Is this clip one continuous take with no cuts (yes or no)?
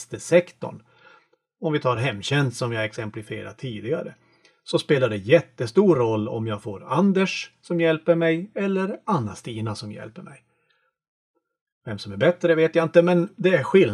yes